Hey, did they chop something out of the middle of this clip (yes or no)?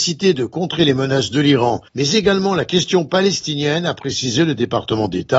yes